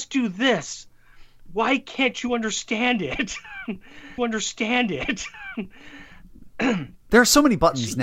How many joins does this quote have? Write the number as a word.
one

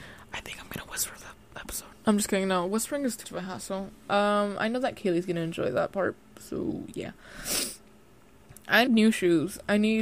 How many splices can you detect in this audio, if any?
three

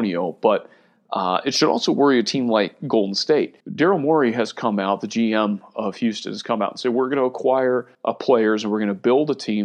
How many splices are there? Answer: two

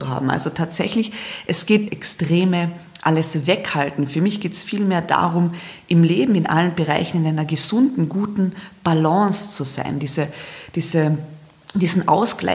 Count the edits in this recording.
one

